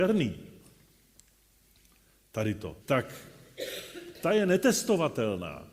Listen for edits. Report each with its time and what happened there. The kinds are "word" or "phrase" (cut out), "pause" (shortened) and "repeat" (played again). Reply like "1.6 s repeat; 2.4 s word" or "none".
2.8 s pause